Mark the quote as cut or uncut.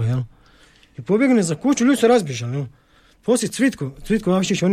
uncut